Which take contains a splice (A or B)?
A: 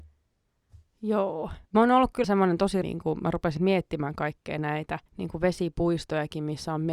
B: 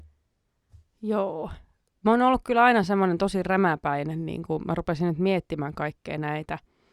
A